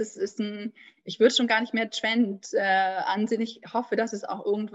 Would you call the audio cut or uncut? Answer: uncut